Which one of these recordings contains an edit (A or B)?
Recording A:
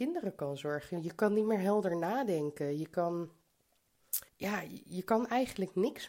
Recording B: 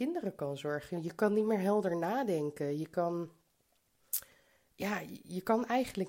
A